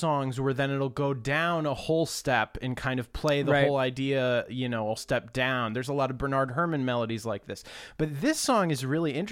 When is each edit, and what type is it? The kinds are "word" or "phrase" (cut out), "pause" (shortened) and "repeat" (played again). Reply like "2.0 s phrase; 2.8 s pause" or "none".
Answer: 5.0 s word